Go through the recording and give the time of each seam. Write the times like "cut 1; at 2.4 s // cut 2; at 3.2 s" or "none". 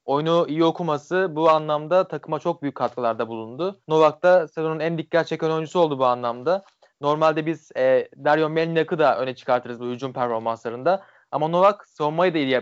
cut 1; at 3.8 s